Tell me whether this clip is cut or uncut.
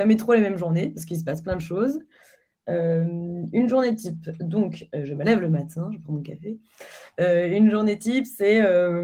uncut